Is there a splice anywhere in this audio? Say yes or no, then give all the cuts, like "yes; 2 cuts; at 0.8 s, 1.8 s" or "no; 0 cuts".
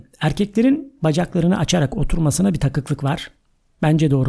no; 0 cuts